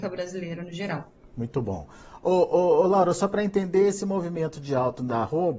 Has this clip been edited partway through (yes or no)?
no